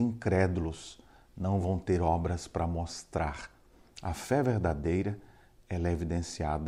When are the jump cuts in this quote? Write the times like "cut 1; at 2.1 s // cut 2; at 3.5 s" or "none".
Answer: none